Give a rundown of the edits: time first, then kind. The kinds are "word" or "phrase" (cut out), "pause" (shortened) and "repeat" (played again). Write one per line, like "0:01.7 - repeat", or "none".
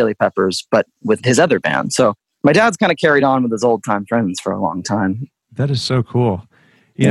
none